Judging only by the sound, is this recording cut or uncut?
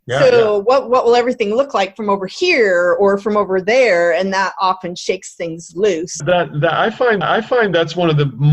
cut